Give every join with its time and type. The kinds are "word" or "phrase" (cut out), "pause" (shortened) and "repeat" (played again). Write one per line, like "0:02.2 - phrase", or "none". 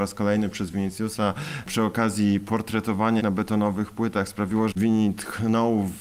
0:03.2 - word
0:04.7 - word